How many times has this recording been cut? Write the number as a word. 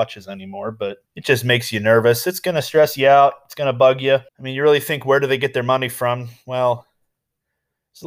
two